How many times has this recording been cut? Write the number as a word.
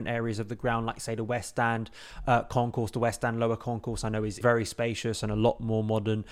one